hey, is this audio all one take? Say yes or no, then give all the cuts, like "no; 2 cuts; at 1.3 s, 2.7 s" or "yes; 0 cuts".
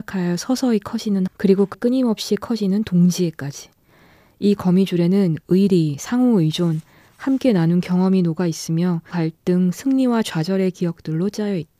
no; 3 cuts; at 1.3 s, 1.7 s, 9.1 s